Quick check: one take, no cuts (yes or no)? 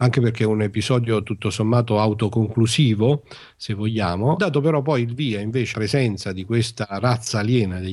no